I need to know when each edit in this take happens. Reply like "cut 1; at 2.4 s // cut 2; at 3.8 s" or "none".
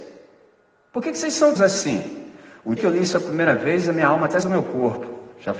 cut 1; at 1.6 s // cut 2; at 2.8 s // cut 3; at 4.4 s